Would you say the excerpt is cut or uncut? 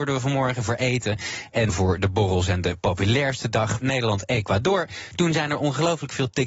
cut